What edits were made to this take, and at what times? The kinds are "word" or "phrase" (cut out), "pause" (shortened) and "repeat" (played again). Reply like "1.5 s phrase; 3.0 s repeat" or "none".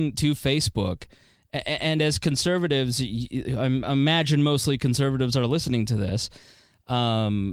none